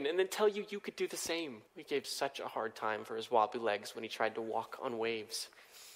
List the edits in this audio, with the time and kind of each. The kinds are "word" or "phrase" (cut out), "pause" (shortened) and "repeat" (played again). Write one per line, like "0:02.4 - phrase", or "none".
0:01.7 - pause
0:02.0 - word